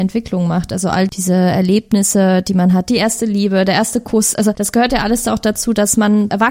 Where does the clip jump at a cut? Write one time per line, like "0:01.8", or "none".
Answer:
none